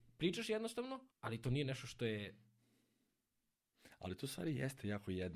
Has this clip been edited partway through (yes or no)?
yes